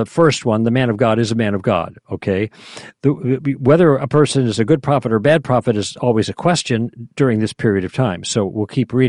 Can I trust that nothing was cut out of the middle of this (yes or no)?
yes